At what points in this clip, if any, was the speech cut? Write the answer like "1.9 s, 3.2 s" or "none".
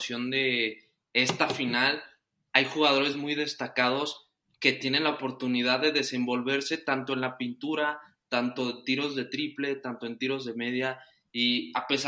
none